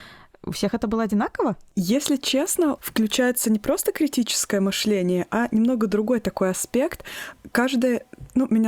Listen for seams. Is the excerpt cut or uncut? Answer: cut